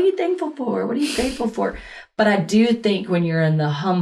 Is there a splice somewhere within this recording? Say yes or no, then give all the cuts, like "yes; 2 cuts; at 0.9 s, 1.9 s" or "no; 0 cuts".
no; 0 cuts